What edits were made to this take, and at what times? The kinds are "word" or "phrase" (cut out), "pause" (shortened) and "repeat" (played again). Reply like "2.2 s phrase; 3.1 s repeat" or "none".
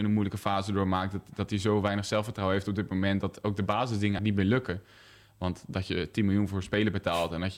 4.2 s word